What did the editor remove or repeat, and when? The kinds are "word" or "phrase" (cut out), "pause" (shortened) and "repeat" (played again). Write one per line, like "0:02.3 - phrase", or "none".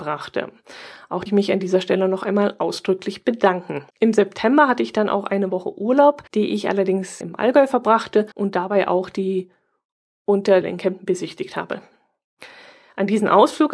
0:01.3 - phrase
0:03.9 - pause
0:06.3 - pause
0:07.2 - word
0:08.3 - pause
0:10.6 - phrase

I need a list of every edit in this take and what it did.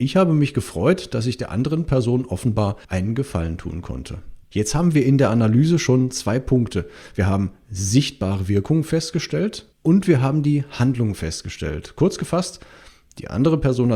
0:02.8 - pause
0:04.4 - pause
0:09.7 - pause

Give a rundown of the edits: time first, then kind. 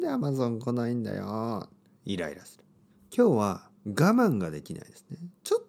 0:02.9 - pause
0:03.8 - pause

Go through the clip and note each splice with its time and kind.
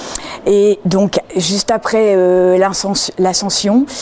none

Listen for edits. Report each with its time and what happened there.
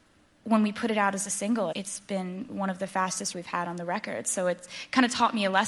0:01.7 - word
0:03.3 - phrase

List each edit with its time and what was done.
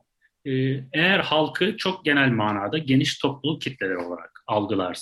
none

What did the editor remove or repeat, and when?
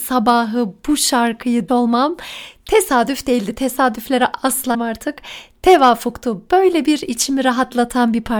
0:01.7 - word
0:04.7 - word

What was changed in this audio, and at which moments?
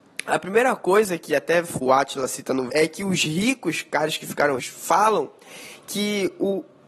0:01.3 - word
0:01.8 - word
0:02.7 - word
0:04.6 - word

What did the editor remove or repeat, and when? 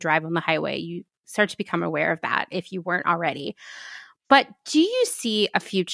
none

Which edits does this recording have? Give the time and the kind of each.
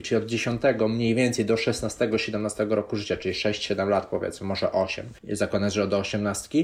0:05.2 - pause

